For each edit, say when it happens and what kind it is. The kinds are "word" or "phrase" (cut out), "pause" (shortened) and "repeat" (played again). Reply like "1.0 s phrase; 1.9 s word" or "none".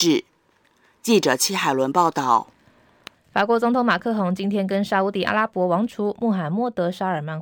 none